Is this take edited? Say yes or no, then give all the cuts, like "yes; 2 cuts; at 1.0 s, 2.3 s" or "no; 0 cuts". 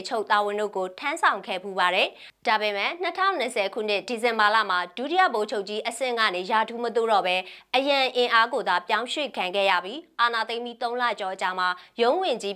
yes; 1 cut; at 2.4 s